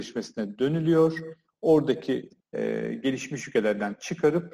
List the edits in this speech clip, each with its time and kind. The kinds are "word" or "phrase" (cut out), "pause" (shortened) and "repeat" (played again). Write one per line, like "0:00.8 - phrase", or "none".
0:02.4 - phrase